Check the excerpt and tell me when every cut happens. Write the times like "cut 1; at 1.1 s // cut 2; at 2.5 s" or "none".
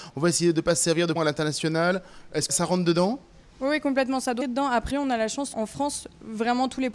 cut 1; at 1.2 s // cut 2; at 2.5 s // cut 3; at 4.4 s // cut 4; at 4.9 s // cut 5; at 5.5 s